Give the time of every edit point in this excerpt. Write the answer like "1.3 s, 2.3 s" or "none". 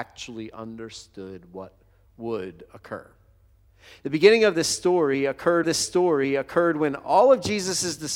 5.6 s